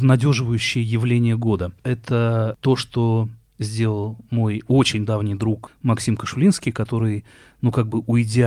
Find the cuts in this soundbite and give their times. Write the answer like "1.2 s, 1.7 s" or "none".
none